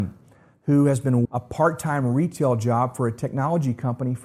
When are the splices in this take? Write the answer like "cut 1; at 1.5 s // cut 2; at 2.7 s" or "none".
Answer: cut 1; at 1.2 s